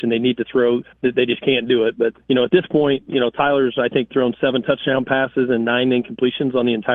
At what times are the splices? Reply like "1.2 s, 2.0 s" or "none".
0.9 s, 2.2 s